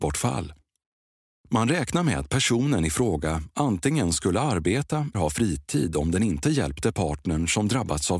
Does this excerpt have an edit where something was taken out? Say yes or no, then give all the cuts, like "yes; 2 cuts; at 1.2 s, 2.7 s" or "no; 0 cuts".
yes; 1 cut; at 5.1 s